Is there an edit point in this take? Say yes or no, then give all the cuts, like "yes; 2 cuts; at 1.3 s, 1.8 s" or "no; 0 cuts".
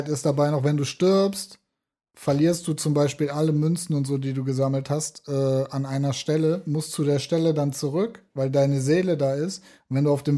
no; 0 cuts